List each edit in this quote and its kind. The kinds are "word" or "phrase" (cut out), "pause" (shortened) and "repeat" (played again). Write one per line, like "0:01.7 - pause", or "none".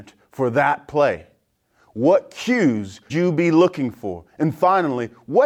0:03.1 - word